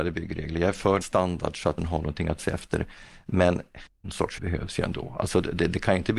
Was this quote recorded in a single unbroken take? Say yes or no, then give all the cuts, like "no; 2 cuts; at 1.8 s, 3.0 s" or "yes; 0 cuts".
no; 5 cuts; at 1.0 s, 1.8 s, 2.4 s, 4.0 s, 4.4 s